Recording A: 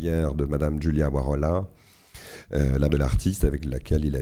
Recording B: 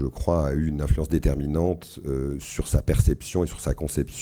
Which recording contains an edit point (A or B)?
A